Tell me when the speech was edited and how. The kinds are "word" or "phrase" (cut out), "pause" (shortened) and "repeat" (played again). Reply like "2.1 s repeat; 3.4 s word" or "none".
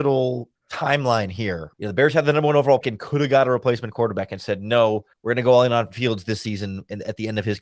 1.7 s word; 2.8 s word; 5.1 s pause